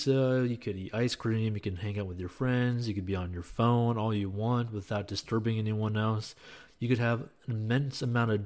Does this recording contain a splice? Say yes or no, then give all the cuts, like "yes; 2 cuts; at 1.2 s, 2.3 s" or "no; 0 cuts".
no; 0 cuts